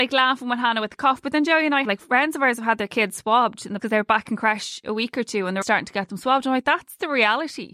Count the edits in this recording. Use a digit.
3